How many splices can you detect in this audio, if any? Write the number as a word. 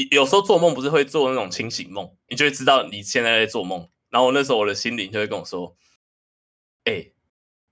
one